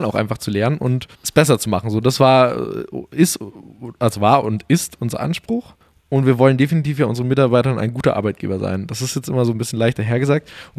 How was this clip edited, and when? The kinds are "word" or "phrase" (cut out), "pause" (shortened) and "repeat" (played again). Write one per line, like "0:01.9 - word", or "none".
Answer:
0:01.1 - pause
0:05.8 - pause